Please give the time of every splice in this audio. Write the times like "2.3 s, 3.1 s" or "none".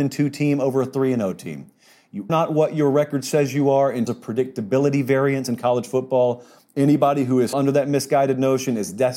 2.3 s, 4.1 s, 7.5 s